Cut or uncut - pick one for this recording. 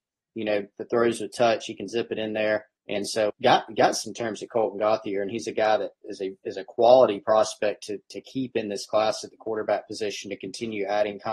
cut